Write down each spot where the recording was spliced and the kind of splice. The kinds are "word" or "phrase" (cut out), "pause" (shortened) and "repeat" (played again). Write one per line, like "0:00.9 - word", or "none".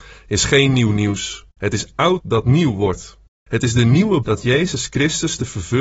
0:01.5 - pause
0:02.2 - word
0:03.3 - pause
0:04.2 - word